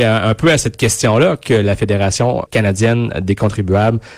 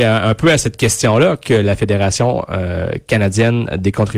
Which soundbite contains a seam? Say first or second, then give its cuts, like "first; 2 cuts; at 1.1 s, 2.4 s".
first; 1 cut; at 2.5 s